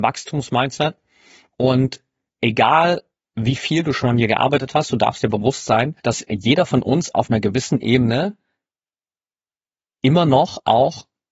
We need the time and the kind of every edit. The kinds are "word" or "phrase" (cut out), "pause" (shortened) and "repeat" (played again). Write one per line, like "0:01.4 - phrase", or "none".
0:03.2 - pause
0:06.0 - pause